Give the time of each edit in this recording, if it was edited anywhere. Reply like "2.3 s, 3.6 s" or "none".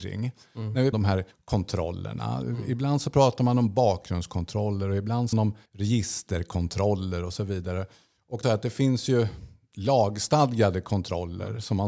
0.9 s, 1.3 s, 5.3 s, 5.7 s, 8.4 s